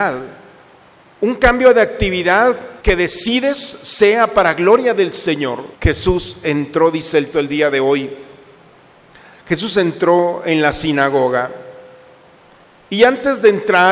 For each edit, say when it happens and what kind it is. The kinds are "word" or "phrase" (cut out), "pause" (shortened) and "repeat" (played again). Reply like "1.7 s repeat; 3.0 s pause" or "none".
2.8 s pause; 5.7 s pause; 7.3 s word